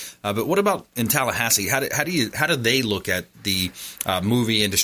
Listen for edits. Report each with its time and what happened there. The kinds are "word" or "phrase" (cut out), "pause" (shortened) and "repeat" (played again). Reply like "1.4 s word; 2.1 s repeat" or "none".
none